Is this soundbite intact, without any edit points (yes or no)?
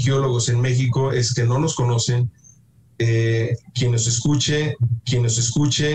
no